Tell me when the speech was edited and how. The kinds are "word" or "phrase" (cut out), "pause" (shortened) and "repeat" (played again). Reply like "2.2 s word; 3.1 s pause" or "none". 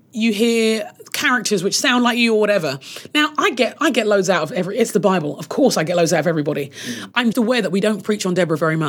7.3 s word

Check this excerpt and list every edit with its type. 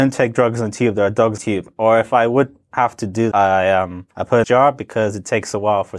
1.4 s word; 3.3 s word; 4.1 s pause; 4.4 s phrase

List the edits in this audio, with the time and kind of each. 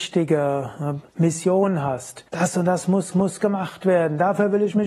1.1 s pause; 2.3 s pause; 3.1 s repeat

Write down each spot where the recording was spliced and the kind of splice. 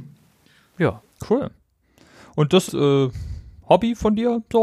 2.7 s phrase

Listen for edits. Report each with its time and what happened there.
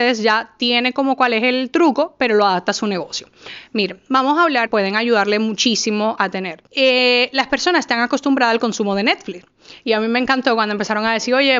4.7 s phrase; 6.2 s word; 6.7 s pause

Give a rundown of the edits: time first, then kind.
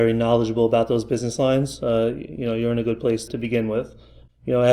3.3 s word

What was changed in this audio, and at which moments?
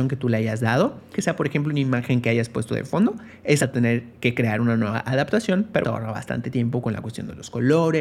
1.1 s word; 3.6 s word; 5.8 s word

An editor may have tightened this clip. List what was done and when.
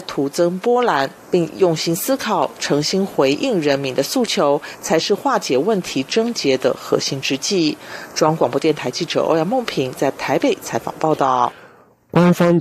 none

